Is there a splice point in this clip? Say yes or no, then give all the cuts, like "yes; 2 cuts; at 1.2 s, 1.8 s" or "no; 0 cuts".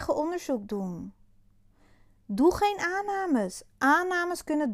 no; 0 cuts